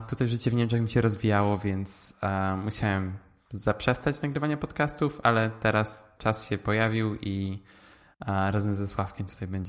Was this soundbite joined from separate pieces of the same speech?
no; 0 cuts

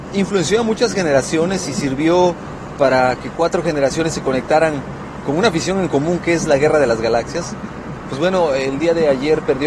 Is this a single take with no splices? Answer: yes; 0 cuts

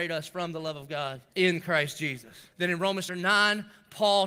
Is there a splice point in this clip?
yes; 3 cuts; at 1.3 s, 2.5 s, 3.1 s

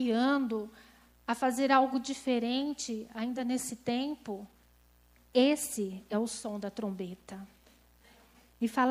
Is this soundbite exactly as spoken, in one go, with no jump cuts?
yes; 0 cuts

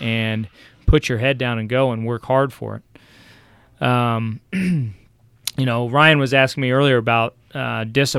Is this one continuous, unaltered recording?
yes; 0 cuts

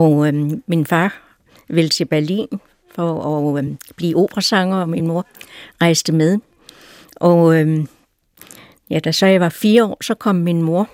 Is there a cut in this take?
no; 0 cuts

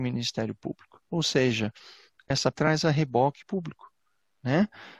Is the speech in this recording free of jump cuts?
no; 3 cuts; at 1.0 s, 2.5 s, 3.4 s

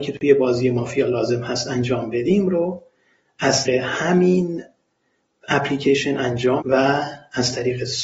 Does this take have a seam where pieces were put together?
yes; 2 cuts; at 3.6 s, 6.6 s

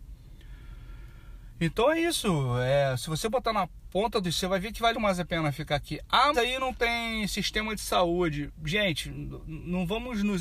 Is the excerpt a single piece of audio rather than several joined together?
no; 3 cuts; at 4.2 s, 4.9 s, 6.3 s

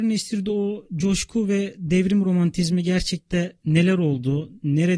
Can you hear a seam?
yes; 1 cut; at 3.6 s

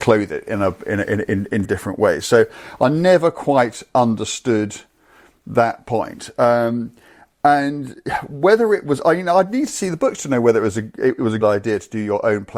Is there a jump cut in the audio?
yes; 2 cuts; at 1.6 s, 11.4 s

